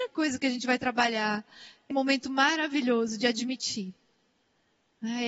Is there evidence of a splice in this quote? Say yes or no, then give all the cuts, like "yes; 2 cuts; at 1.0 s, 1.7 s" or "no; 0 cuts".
yes; 1 cut; at 1.9 s